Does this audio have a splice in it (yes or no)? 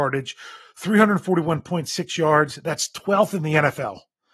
no